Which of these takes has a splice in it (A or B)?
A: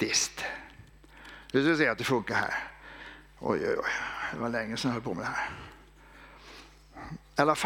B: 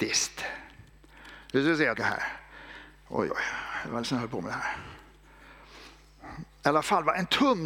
B